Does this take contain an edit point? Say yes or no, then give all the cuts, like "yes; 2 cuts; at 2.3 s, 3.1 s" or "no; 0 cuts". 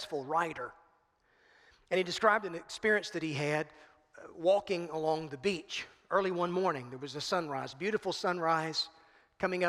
no; 0 cuts